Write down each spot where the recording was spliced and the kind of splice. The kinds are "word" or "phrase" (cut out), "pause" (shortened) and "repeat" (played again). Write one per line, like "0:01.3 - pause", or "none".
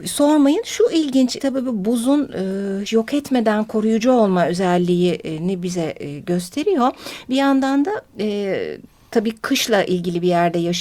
0:01.4 - phrase
0:02.9 - word